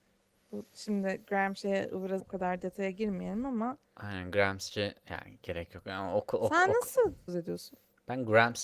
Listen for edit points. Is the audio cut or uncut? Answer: cut